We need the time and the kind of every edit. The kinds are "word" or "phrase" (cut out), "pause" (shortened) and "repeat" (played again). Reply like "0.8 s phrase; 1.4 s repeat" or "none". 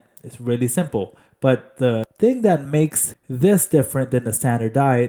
none